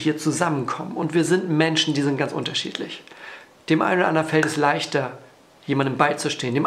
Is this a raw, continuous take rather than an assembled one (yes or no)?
yes